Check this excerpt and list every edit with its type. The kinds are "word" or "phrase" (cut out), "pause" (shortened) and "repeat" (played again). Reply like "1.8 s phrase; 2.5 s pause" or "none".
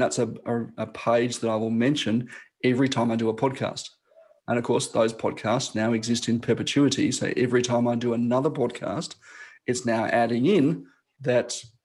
none